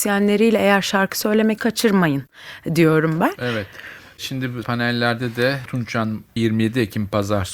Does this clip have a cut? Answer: yes; 4 cuts; at 1.6 s, 4.6 s, 5.7 s, 6.4 s

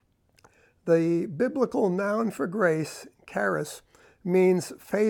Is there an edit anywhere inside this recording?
no; 0 cuts

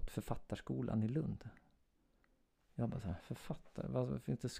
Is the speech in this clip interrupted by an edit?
yes; 1 cut; at 3.2 s

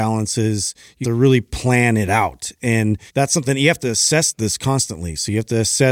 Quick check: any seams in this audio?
yes; 2 cuts; at 1.0 s, 3.1 s

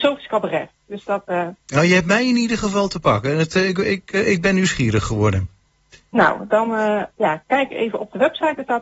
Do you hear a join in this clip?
yes; 2 cuts; at 1.6 s, 7.1 s

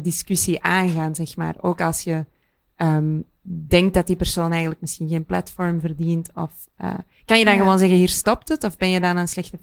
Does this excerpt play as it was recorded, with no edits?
yes; 0 cuts

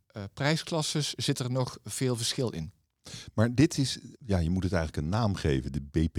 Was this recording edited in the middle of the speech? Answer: yes; 1 cut; at 4.1 s

